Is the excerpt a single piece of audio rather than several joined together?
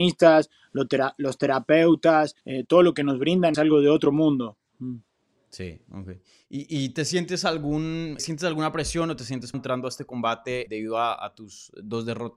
no; 5 cuts; at 2.4 s, 3.5 s, 8.2 s, 9.5 s, 10.7 s

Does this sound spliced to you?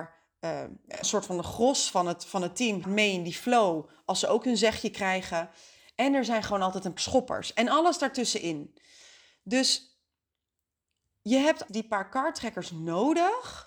yes; 4 cuts; at 1.0 s, 2.8 s, 7.0 s, 11.7 s

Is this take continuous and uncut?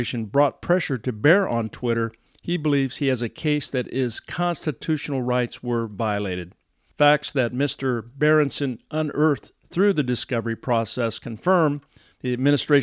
yes; 0 cuts

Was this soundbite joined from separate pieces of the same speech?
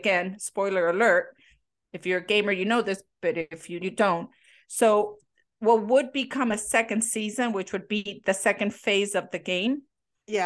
yes; 1 cut; at 3.8 s

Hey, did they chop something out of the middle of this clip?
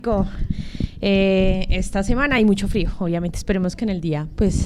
no; 0 cuts

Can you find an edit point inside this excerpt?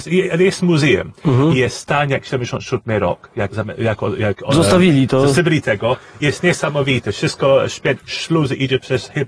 yes; 2 cuts; at 3.5 s, 8.0 s

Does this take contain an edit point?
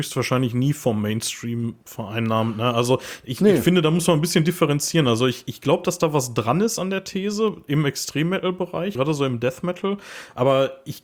yes; 2 cuts; at 1.8 s, 9.0 s

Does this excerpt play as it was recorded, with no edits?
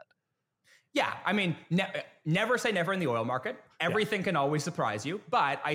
yes; 0 cuts

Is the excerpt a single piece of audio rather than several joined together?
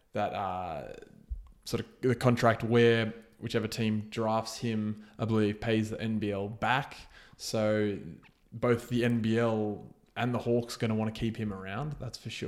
yes; 0 cuts

